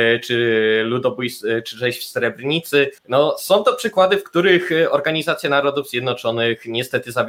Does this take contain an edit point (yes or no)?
yes